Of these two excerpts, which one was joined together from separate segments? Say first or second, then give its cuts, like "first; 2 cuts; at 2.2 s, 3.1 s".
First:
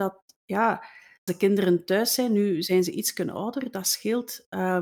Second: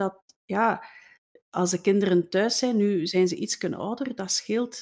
first; 1 cut; at 1.3 s